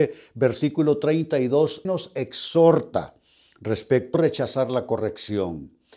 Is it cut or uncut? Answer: cut